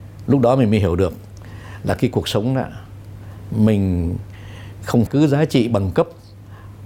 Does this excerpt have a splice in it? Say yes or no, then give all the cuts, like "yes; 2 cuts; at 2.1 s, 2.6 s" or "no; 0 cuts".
yes; 1 cut; at 5.1 s